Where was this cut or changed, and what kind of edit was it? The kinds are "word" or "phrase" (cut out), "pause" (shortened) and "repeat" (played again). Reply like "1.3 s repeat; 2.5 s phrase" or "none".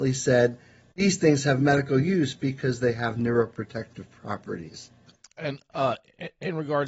none